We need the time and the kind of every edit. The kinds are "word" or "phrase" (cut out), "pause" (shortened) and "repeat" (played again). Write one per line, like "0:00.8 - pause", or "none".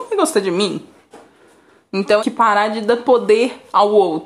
0:02.2 - phrase